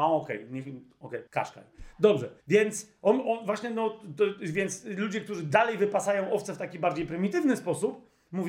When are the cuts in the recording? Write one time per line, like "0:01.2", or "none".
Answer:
0:01.3
0:02.4